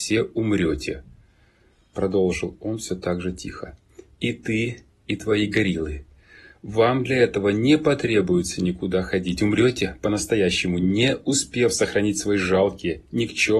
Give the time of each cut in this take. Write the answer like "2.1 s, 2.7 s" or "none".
none

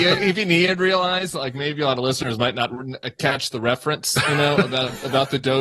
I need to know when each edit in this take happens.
none

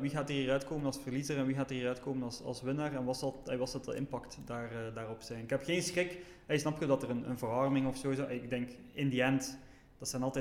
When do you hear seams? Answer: none

